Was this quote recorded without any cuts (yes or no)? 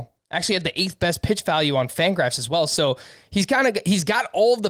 yes